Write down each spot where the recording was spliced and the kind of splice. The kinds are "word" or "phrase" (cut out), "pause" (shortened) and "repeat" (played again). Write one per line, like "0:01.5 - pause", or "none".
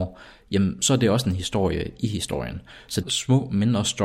0:03.0 - phrase